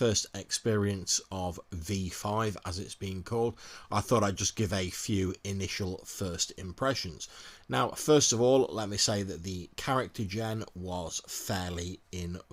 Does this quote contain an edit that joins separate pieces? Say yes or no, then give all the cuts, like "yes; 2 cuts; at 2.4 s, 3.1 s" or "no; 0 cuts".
no; 0 cuts